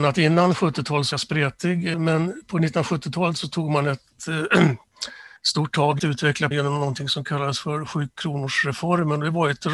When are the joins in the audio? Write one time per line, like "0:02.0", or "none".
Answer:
0:01.1
0:01.9
0:05.4
0:06.0
0:06.5